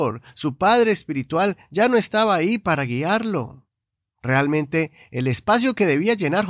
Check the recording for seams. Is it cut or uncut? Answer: uncut